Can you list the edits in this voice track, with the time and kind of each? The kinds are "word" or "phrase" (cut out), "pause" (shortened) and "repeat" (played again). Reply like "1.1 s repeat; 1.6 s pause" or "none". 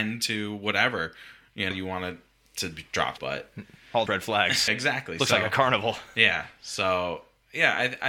1.7 s word; 3.2 s word; 4.1 s word; 4.7 s word